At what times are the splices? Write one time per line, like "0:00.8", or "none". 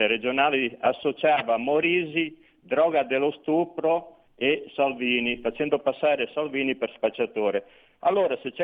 0:04.3